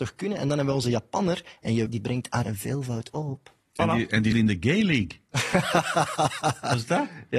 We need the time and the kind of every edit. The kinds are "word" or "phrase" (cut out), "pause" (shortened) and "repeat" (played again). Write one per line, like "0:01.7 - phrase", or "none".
0:01.9 - word
0:02.4 - word
0:04.3 - word